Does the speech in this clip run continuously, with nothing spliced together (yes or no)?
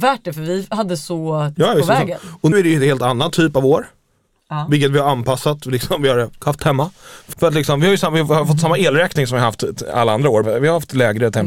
no